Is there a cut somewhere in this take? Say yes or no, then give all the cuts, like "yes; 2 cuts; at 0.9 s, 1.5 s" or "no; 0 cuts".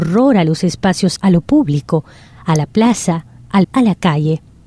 yes; 2 cuts; at 1.2 s, 3.6 s